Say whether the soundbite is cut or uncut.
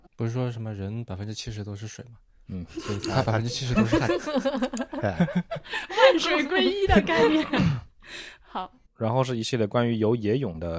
uncut